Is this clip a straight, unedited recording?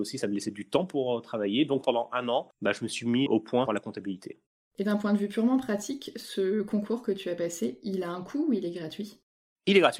no; 3 cuts; at 1.8 s, 3.3 s, 3.7 s

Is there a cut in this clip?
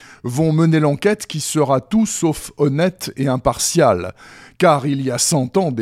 no; 0 cuts

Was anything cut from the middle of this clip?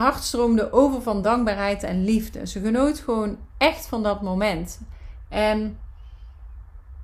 no; 0 cuts

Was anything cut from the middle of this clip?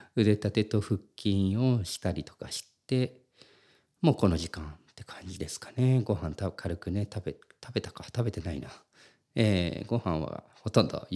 no; 0 cuts

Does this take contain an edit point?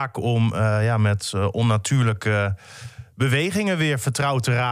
no; 0 cuts

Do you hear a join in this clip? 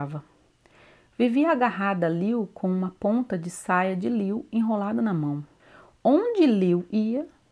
yes; 1 cut; at 5.6 s

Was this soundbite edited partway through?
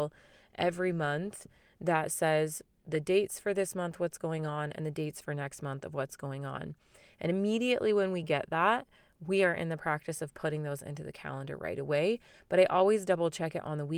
no; 0 cuts

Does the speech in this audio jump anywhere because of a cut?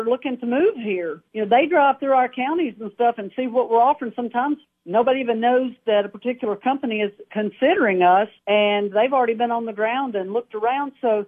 yes; 3 cuts; at 1.3 s, 4.6 s, 8.4 s

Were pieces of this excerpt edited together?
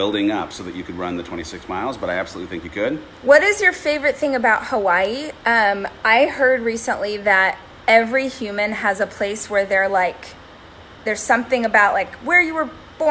no; 0 cuts

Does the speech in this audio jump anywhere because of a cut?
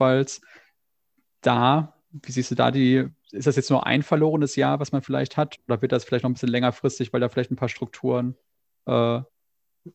no; 0 cuts

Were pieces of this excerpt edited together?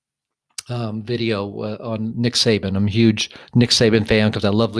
no; 0 cuts

